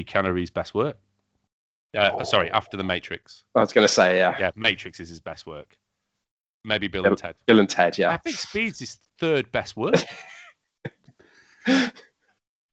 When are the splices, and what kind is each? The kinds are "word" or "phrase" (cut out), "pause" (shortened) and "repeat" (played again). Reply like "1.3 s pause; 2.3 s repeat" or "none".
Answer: none